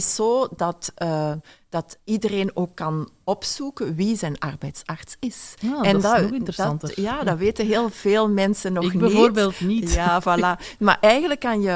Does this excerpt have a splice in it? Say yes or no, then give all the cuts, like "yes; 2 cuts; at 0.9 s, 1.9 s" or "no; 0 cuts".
no; 0 cuts